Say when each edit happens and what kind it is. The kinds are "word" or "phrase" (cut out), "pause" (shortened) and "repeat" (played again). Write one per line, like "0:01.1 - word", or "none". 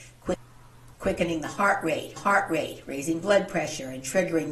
0:02.2 - repeat